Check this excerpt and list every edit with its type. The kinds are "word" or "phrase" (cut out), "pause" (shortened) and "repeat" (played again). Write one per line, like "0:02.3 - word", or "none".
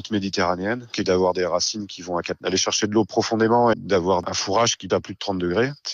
0:01.0 - word
0:02.4 - word
0:03.7 - word
0:04.9 - word